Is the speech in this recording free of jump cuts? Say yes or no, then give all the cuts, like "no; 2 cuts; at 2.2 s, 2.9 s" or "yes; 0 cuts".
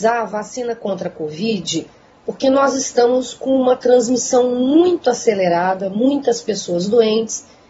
yes; 0 cuts